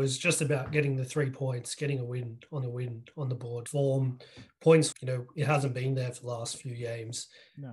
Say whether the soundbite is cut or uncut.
cut